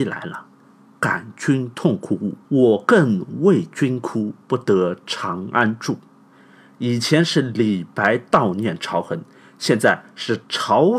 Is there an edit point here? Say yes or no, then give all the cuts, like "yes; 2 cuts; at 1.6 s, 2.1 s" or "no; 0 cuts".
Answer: yes; 2 cuts; at 2.4 s, 4.4 s